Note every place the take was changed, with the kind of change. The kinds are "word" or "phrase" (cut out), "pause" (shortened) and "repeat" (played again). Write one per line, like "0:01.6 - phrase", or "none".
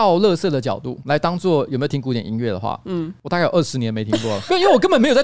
none